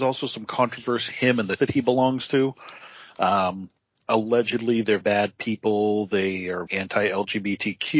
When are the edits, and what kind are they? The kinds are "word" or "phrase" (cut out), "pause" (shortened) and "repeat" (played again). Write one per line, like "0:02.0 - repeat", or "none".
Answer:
0:01.1 - word
0:01.6 - word
0:05.0 - word
0:06.7 - word